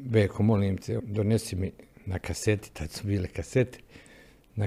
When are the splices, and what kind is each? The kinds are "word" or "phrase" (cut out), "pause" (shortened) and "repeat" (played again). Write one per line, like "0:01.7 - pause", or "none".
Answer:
0:01.0 - word